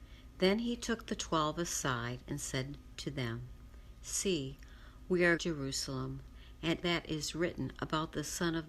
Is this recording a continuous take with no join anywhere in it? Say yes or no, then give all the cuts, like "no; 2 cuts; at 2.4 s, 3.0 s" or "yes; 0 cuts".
no; 2 cuts; at 5.4 s, 6.8 s